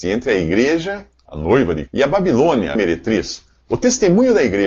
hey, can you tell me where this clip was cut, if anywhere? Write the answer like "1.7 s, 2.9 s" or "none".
1.9 s, 2.7 s